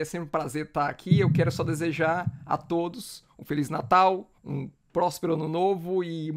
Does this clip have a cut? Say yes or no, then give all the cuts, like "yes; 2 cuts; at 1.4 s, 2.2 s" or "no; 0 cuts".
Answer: yes; 1 cut; at 4.4 s